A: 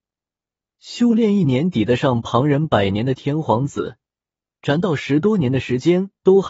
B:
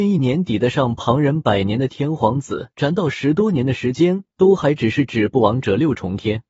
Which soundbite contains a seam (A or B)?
B